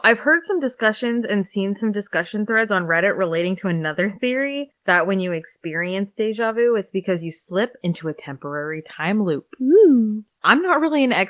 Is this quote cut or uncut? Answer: uncut